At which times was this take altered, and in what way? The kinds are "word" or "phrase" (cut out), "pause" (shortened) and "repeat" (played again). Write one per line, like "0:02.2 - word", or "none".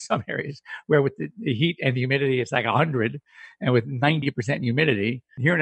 none